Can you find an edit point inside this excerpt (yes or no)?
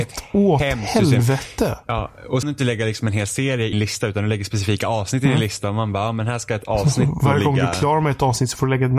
yes